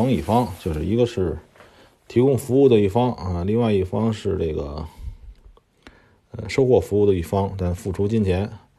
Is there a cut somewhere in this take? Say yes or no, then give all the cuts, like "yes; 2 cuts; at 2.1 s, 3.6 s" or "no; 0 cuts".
no; 0 cuts